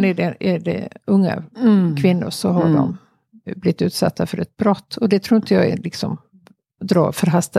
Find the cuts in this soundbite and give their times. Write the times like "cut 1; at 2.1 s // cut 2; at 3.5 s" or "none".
none